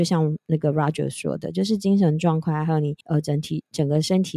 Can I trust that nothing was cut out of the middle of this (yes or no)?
no